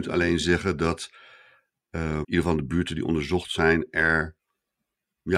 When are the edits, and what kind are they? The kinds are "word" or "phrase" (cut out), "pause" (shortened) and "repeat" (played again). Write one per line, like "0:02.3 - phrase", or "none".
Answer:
0:02.2 - word